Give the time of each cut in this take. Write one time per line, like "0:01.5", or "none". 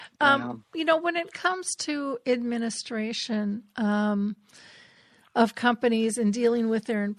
none

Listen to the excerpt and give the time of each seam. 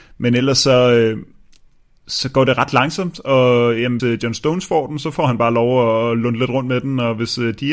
0:04.0

